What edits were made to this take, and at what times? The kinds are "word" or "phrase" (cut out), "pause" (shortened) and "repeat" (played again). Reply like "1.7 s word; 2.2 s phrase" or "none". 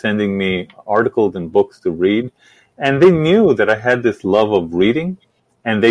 none